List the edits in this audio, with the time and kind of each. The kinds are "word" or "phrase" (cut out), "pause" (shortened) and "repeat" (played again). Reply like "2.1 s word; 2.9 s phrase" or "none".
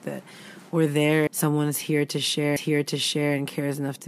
1.3 s word; 2.6 s repeat